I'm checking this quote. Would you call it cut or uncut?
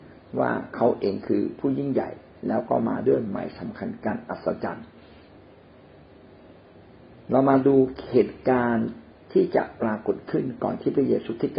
cut